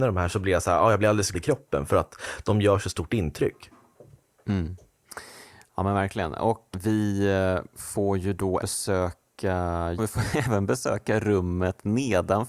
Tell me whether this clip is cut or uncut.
cut